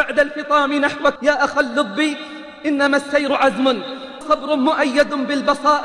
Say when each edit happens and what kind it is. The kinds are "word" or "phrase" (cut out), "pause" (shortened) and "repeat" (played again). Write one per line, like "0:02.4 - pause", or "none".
0:01.2 - word
0:04.2 - word